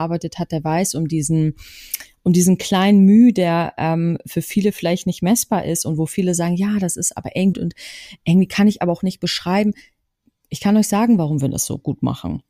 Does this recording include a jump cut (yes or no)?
yes